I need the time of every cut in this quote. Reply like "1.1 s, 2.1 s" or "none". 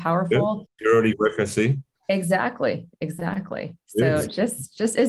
1.1 s